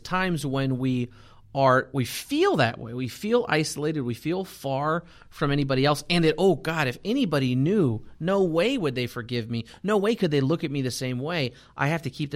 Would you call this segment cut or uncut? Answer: uncut